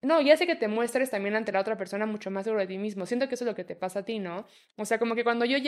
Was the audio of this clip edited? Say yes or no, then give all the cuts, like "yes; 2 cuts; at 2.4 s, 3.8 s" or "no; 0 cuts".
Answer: no; 0 cuts